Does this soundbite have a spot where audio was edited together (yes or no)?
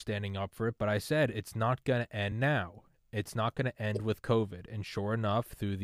no